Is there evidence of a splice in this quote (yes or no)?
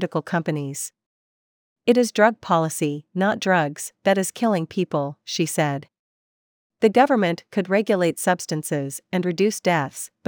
no